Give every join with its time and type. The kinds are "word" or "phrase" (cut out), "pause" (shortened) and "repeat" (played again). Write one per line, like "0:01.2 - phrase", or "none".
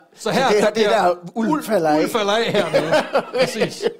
none